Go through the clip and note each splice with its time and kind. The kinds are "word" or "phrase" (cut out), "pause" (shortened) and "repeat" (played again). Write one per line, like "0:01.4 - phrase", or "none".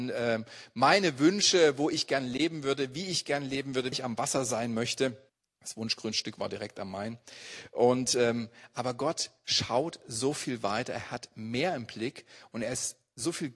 0:03.9 - phrase
0:05.3 - pause